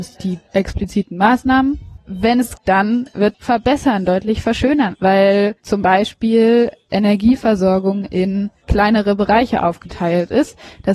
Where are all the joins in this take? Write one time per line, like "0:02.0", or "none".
0:02.6
0:03.3
0:04.9